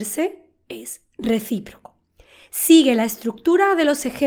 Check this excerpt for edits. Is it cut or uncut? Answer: uncut